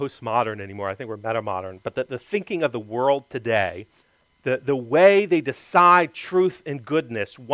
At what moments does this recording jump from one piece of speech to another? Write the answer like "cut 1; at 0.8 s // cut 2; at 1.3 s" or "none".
cut 1; at 4.0 s